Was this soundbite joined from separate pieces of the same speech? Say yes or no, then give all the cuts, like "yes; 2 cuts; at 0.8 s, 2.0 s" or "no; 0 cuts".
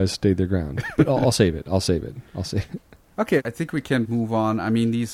yes; 1 cut; at 4.1 s